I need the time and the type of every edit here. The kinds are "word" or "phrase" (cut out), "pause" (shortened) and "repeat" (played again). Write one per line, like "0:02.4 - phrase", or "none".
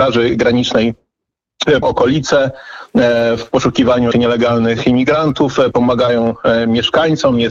0:01.8 - word
0:04.1 - word